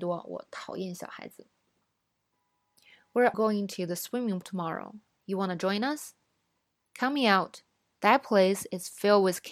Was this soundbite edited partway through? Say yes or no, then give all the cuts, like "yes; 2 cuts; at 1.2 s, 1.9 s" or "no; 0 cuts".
yes; 2 cuts; at 3.3 s, 4.4 s